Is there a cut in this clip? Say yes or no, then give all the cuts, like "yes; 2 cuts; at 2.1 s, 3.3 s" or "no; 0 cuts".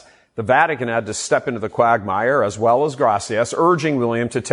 no; 0 cuts